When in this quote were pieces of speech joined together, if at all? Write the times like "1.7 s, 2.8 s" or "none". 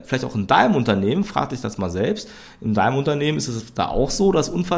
none